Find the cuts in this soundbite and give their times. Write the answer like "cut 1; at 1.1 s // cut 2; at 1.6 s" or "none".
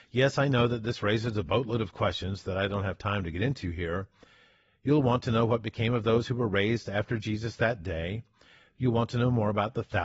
none